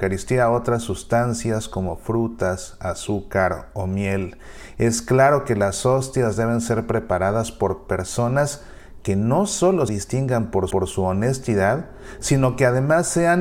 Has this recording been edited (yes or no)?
yes